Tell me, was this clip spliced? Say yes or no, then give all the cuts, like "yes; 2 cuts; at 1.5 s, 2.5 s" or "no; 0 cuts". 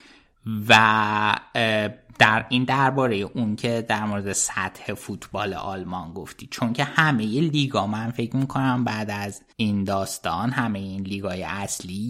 yes; 1 cut; at 9.5 s